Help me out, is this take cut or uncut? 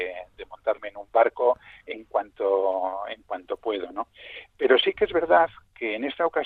uncut